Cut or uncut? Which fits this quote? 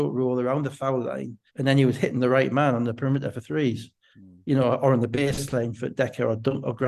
cut